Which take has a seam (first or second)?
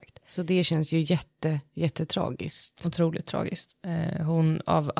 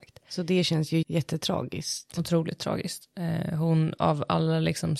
second